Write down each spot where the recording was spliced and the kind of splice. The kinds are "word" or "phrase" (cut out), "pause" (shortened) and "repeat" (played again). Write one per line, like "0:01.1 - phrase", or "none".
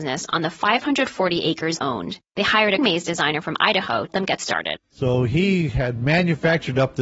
0:01.8 - word
0:02.3 - pause
0:02.8 - word
0:04.1 - word
0:04.8 - pause